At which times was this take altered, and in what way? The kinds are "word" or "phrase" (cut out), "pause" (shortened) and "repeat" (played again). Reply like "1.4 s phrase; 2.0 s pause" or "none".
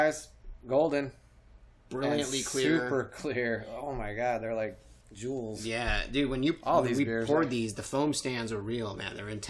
1.7 s pause; 5.0 s pause